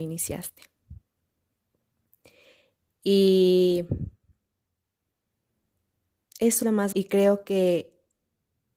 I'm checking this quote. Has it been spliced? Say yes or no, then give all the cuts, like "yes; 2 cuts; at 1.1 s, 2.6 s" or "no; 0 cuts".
yes; 2 cuts; at 6.6 s, 6.9 s